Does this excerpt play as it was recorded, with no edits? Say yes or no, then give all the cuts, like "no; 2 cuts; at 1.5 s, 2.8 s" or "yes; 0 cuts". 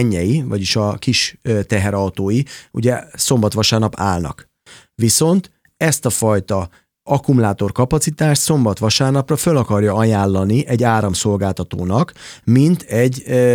yes; 0 cuts